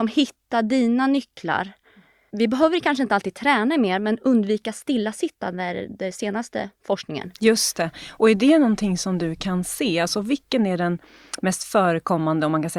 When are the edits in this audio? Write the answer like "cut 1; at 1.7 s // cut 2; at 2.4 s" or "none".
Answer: none

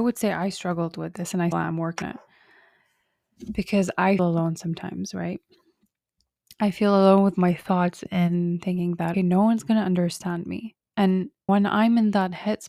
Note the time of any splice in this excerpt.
cut 1; at 1.5 s // cut 2; at 2.0 s // cut 3; at 4.2 s // cut 4; at 9.1 s // cut 5; at 11.5 s

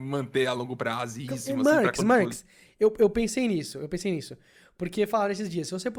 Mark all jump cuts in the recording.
none

